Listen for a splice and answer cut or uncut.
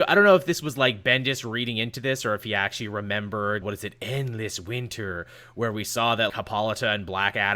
cut